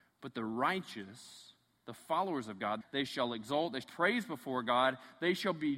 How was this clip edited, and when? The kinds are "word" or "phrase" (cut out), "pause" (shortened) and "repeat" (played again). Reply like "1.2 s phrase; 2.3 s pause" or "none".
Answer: 2.8 s phrase; 3.8 s word

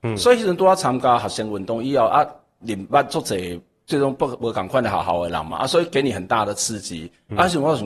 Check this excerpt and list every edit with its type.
none

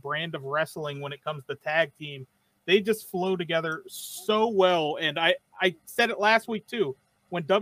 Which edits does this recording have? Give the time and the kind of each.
none

